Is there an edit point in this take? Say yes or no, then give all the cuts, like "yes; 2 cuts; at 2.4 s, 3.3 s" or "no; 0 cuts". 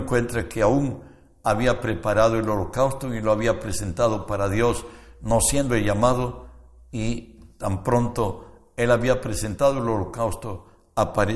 no; 0 cuts